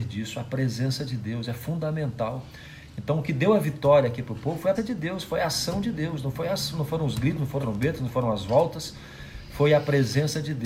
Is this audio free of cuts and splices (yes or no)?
no